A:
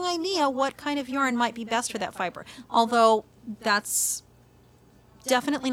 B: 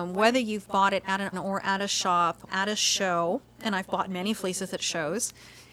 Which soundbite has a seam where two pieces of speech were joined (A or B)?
B